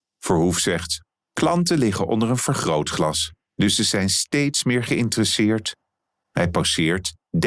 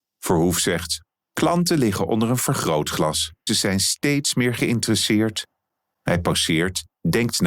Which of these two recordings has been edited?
second; 1 cut; at 3.5 s

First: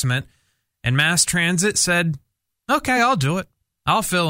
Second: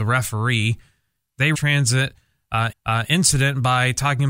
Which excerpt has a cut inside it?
second; 2 cuts; at 1.5 s, 2.7 s

